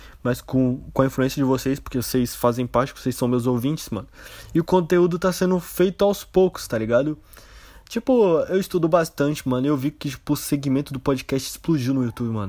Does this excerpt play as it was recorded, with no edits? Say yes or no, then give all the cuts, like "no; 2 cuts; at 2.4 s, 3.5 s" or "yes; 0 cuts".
yes; 0 cuts